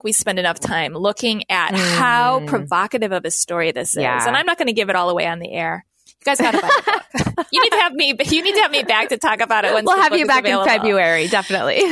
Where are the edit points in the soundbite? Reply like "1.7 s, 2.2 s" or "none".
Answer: none

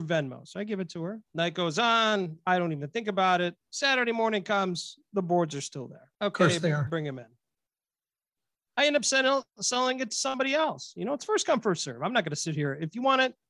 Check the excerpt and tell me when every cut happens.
1.3 s, 3.6 s, 6.1 s

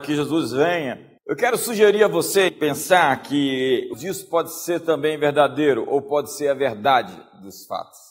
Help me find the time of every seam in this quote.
1.2 s, 2.5 s, 3.9 s

